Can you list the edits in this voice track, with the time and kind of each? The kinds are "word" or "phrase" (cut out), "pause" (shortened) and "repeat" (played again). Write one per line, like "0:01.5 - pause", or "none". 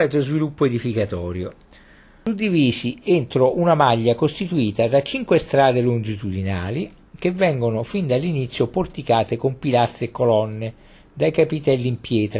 none